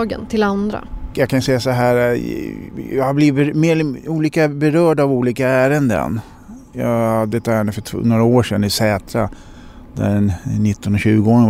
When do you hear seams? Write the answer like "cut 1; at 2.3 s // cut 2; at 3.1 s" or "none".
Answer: none